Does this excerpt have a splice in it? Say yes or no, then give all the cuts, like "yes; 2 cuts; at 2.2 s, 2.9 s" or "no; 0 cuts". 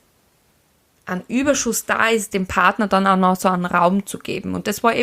no; 0 cuts